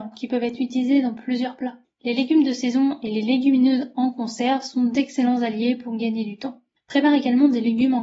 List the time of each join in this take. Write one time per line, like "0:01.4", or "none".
0:01.8
0:06.8